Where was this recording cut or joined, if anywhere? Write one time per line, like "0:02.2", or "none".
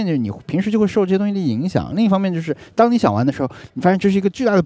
none